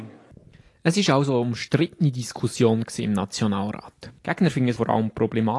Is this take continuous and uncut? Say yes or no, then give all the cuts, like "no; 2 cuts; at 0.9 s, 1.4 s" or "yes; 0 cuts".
no; 1 cut; at 4.2 s